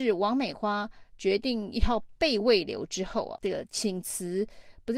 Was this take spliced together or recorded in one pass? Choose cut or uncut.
cut